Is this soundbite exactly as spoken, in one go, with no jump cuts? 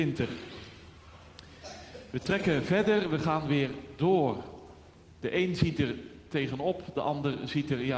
yes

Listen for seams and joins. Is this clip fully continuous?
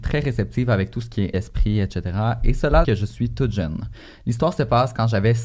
no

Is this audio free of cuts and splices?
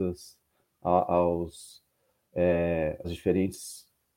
no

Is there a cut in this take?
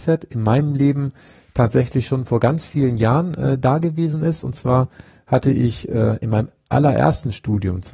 no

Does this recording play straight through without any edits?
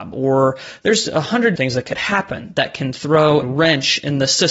no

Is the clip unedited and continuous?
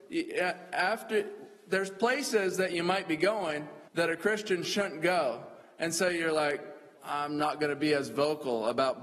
no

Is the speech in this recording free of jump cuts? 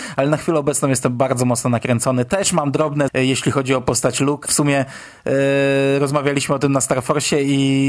no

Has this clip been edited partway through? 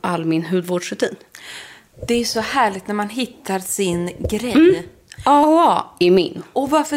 no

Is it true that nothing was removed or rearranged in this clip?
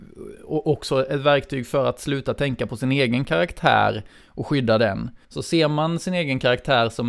no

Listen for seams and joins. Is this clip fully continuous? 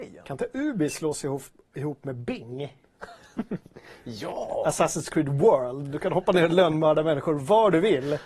yes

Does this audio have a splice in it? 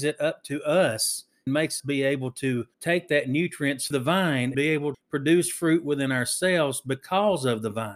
yes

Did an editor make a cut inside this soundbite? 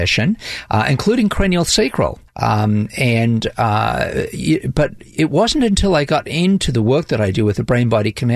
yes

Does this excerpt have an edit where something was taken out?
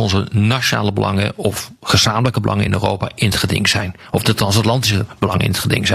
no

